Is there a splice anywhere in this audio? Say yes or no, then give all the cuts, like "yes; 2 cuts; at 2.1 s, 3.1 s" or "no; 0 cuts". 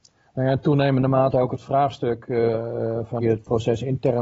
yes; 1 cut; at 3.2 s